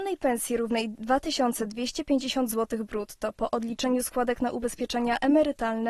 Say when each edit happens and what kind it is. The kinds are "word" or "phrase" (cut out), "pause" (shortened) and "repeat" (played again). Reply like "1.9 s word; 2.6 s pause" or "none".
none